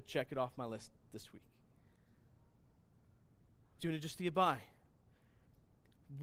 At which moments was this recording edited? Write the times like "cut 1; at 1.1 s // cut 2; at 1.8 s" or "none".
cut 1; at 3.8 s